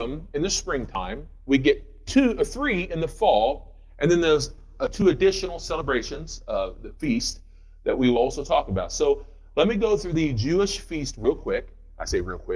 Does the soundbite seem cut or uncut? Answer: uncut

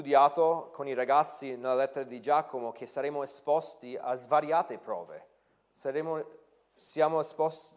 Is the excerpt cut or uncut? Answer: uncut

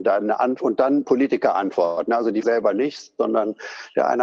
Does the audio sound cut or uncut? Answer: cut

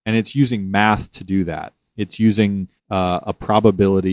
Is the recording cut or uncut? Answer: cut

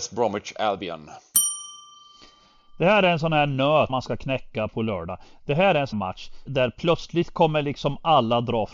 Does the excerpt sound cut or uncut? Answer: cut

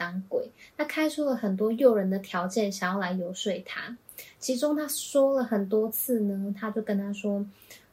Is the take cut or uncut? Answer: uncut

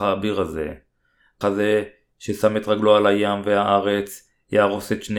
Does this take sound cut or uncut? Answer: cut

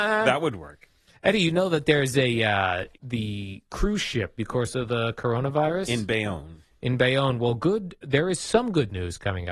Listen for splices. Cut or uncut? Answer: cut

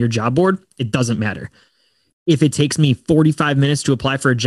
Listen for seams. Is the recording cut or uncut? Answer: uncut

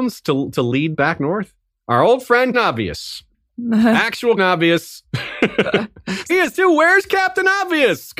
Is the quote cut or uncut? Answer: cut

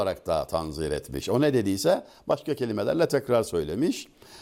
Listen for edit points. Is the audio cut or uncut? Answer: uncut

